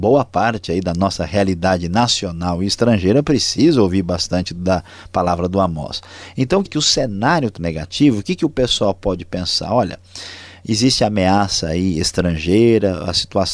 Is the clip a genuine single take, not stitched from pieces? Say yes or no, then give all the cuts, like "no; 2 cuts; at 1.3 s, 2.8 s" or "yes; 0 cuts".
no; 2 cuts; at 6.7 s, 7.6 s